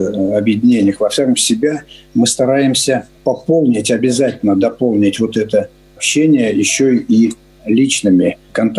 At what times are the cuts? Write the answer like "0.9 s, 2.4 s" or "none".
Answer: 1.3 s, 3.2 s